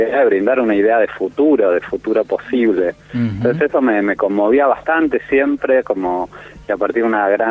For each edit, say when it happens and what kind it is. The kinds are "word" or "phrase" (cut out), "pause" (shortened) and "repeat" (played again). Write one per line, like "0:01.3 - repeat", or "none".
none